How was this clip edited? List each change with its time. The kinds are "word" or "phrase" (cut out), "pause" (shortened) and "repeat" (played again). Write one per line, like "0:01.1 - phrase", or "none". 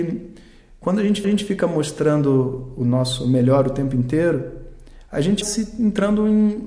0:01.2 - repeat
0:05.4 - word